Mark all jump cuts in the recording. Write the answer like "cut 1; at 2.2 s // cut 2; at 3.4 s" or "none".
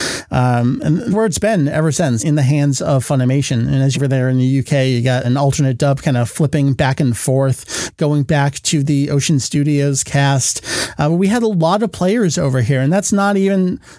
cut 1; at 1.1 s // cut 2; at 2.2 s // cut 3; at 3.9 s // cut 4; at 5.2 s